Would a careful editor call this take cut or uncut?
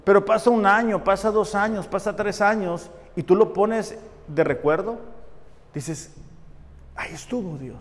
uncut